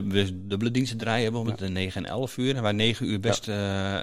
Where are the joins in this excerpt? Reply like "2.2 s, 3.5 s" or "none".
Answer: none